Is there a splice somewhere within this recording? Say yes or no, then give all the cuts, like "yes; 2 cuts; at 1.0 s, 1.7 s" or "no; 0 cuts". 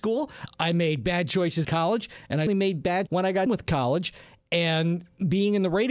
yes; 4 cuts; at 1.6 s, 2.5 s, 3.1 s, 3.5 s